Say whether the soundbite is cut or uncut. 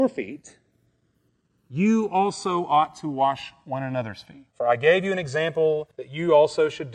cut